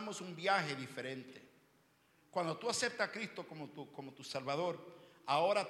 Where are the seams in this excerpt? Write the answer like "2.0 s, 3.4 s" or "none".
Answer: none